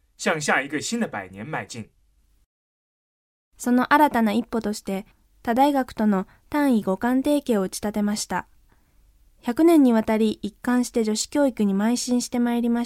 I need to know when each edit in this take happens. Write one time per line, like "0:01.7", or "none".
none